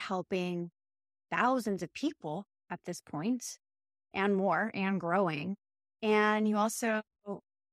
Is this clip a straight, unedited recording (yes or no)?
yes